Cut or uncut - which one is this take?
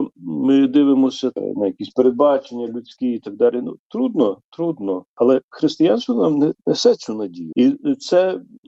cut